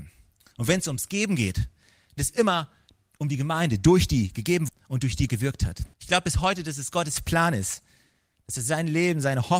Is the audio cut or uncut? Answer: cut